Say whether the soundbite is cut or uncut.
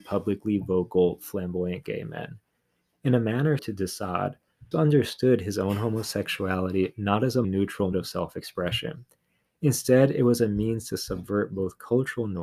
cut